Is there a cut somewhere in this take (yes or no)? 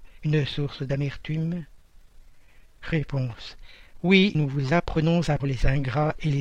yes